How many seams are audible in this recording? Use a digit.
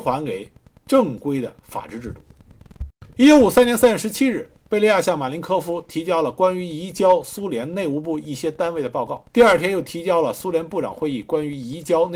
2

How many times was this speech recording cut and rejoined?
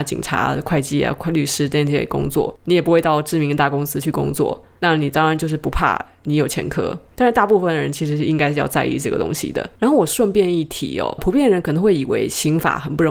2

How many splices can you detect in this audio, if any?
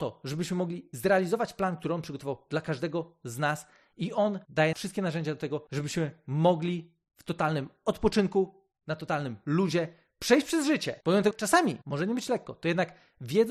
2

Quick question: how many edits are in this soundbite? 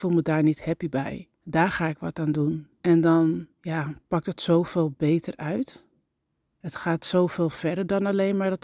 3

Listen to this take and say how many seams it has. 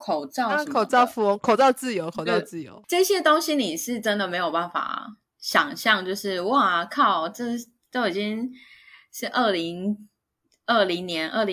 1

